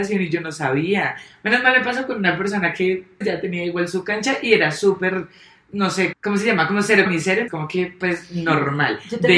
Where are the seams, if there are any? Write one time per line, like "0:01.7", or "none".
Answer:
0:03.2
0:06.1
0:07.1
0:07.5

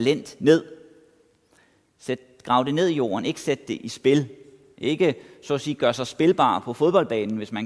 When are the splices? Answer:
none

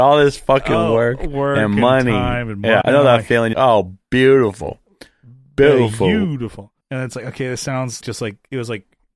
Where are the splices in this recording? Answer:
0:02.8
0:03.5
0:06.8
0:08.0

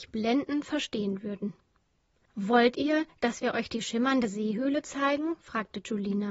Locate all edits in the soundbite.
none

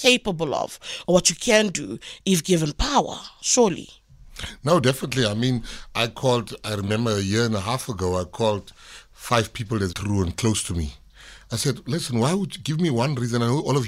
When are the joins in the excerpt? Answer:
0:09.9

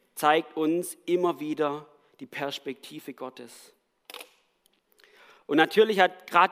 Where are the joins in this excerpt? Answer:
none

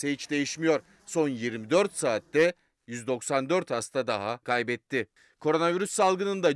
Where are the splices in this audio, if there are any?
0:04.4

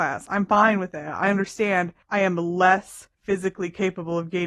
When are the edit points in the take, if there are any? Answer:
0:02.0
0:03.1

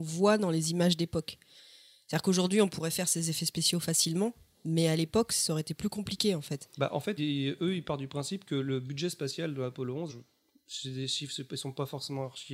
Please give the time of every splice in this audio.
0:06.7
0:07.2
0:10.1

